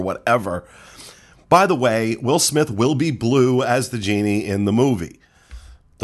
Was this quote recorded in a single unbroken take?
yes; 0 cuts

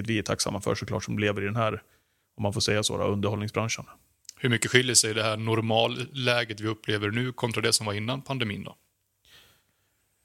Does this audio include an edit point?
no; 0 cuts

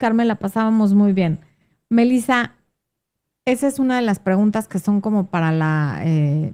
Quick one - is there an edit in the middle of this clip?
no; 0 cuts

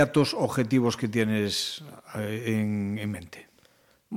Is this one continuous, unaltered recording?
yes; 0 cuts

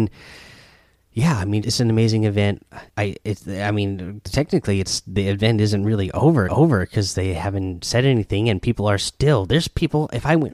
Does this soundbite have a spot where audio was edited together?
yes; 3 cuts; at 1.6 s, 2.9 s, 6.5 s

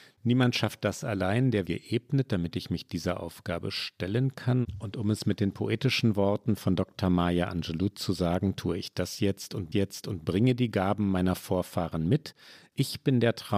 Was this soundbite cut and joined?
yes; 2 cuts; at 1.7 s, 9.7 s

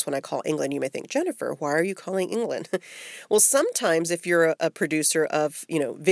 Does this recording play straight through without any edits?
yes; 0 cuts

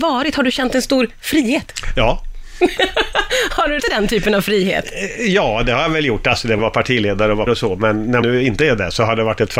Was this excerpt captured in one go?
no; 4 cuts; at 3.8 s, 6.6 s, 7.5 s, 8.2 s

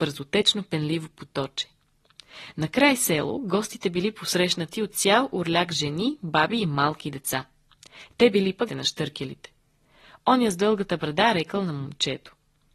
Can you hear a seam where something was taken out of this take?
yes; 1 cut; at 8.7 s

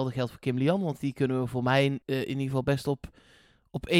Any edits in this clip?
yes; 1 cut; at 2.0 s

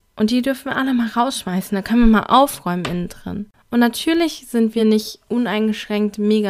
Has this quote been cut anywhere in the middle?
no; 0 cuts

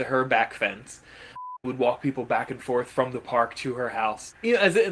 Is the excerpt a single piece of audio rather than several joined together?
yes; 0 cuts

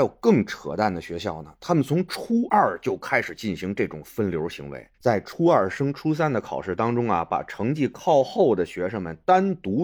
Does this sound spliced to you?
yes; 1 cut; at 4.9 s

